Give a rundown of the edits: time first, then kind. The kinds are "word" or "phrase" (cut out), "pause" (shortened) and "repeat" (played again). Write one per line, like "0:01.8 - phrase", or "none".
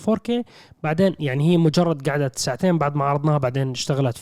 none